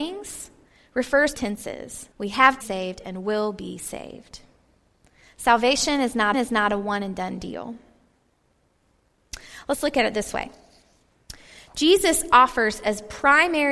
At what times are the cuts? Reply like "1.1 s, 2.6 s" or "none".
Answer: 1.3 s, 2.1 s, 2.6 s, 6.3 s